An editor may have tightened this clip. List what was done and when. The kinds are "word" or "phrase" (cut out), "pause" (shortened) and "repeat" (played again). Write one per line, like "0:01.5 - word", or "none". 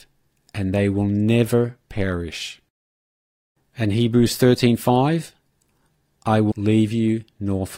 0:06.5 - word